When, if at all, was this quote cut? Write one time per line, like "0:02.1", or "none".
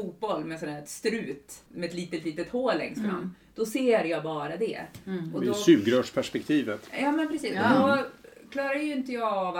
0:01.7